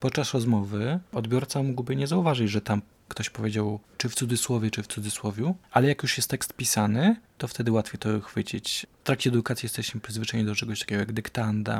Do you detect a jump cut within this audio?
no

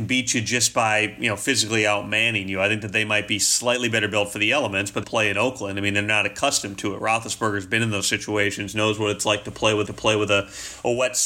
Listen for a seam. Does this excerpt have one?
yes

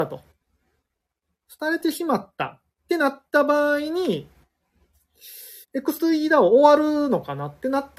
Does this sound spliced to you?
yes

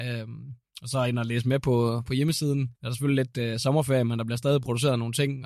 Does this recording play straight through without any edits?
no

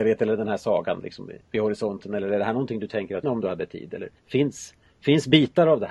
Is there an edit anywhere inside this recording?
yes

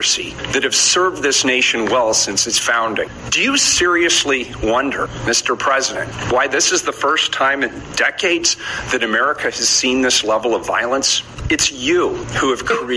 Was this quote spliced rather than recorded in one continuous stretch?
no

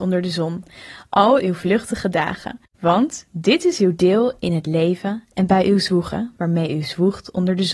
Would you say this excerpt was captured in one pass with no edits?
no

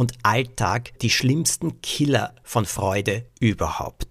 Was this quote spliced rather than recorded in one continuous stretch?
yes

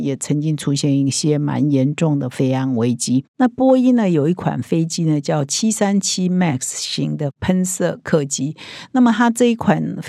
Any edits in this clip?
no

